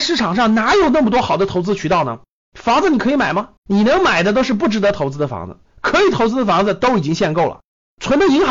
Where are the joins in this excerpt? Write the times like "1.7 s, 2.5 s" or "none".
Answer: 3.6 s